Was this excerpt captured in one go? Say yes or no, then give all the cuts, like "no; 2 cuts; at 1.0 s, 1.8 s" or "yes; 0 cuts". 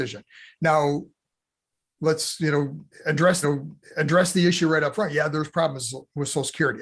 no; 1 cut; at 3.4 s